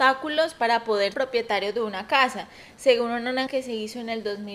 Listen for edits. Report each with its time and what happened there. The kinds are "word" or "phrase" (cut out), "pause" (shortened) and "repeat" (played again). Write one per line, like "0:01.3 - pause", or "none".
0:01.1 - word
0:03.5 - word